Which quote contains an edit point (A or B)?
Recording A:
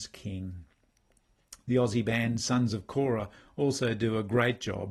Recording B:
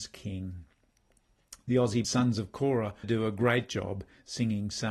B